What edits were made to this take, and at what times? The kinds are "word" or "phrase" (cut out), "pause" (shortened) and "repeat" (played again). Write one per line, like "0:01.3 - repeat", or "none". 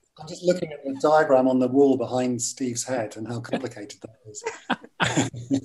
none

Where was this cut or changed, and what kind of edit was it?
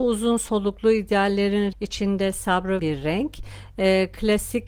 0:01.7 - word
0:02.8 - phrase

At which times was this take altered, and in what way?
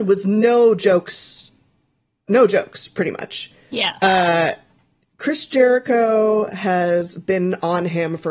none

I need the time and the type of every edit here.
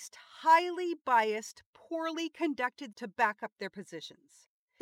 0:02.9 - word

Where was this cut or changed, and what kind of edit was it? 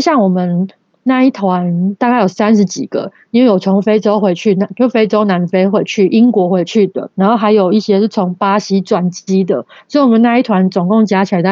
0:07.1 - pause

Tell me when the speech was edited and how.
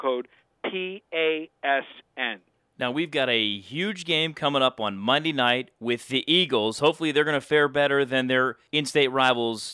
none

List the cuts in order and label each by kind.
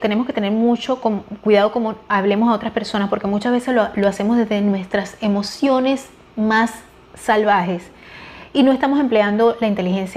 none

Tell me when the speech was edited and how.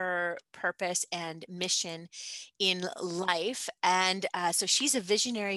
none

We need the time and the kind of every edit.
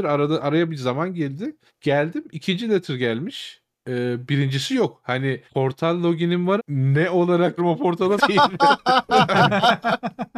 0:01.7 - pause
0:05.5 - pause
0:06.6 - word
0:07.6 - word
0:08.2 - word

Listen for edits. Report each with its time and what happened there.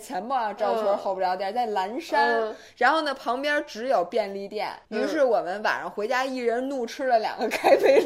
0:04.8 - pause

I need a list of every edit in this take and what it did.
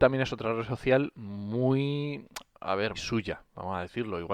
0:02.9 - word

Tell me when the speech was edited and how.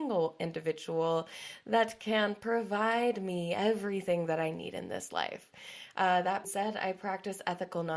0:06.4 - word

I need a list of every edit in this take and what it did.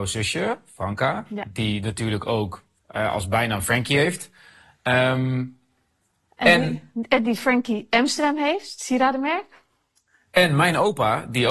none

